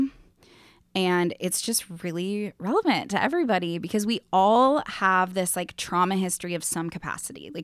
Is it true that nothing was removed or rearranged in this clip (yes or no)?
yes